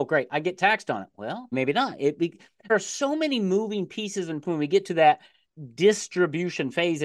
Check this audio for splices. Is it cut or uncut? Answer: cut